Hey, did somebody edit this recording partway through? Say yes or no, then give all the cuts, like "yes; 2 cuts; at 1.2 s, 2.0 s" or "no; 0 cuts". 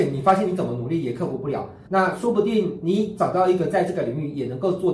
yes; 1 cut; at 1.9 s